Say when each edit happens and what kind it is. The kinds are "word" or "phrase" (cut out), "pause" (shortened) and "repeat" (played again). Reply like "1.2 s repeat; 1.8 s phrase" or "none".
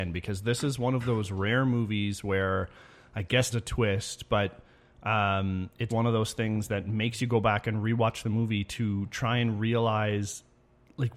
3.5 s word; 5.9 s word